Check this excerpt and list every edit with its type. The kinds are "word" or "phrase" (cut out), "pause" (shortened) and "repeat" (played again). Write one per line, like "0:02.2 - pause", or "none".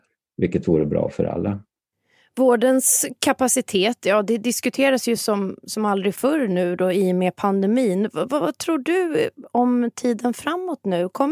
none